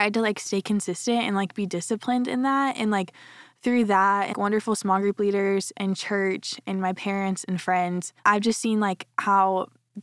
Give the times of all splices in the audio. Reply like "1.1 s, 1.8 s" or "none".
4.3 s, 8.2 s